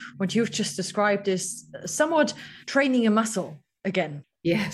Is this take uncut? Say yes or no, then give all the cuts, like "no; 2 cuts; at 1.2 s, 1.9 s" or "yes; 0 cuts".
no; 1 cut; at 2.6 s